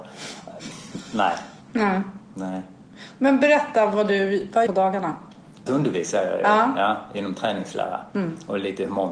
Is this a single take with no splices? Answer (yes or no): no